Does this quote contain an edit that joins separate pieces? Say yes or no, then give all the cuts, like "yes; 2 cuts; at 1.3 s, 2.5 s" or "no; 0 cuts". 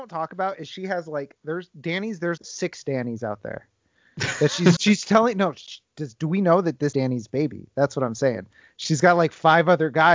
yes; 3 cuts; at 2.4 s, 4.8 s, 6.9 s